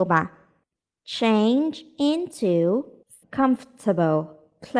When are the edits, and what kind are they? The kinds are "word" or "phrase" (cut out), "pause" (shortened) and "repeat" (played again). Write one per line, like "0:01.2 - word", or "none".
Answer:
0:03.2 - word